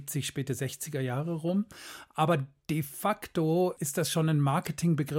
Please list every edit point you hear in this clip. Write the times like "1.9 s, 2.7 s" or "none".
none